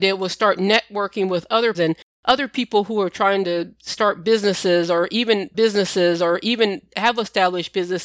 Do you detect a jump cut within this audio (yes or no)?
yes